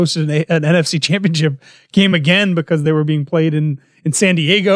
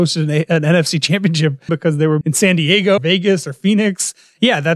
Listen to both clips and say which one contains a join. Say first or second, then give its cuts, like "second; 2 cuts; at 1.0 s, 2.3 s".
second; 3 cuts; at 1.7 s, 2.2 s, 3.0 s